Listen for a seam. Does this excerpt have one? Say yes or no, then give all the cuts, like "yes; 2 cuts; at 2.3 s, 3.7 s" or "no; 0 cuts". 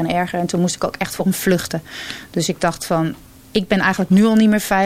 no; 0 cuts